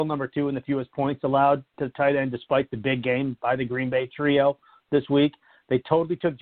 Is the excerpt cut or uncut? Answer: uncut